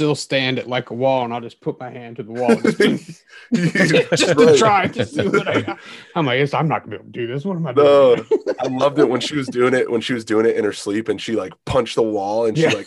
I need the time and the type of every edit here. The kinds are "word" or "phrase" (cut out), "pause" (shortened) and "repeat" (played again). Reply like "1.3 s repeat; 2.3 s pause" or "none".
none